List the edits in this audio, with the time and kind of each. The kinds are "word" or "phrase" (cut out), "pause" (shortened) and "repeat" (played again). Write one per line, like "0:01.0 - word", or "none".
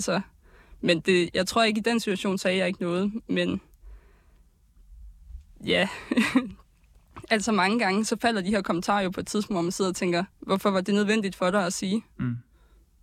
0:10.3 - pause